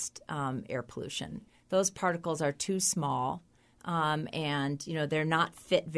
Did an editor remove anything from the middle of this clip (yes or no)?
no